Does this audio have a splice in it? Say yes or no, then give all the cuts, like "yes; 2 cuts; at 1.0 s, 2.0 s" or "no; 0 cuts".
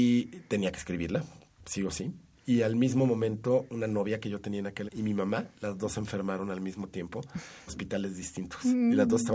yes; 3 cuts; at 3.7 s, 4.9 s, 7.7 s